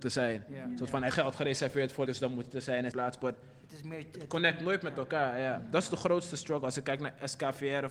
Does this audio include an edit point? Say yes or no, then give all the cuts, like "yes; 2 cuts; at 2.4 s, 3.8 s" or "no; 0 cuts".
yes; 3 cuts; at 1.1 s, 2.1 s, 2.9 s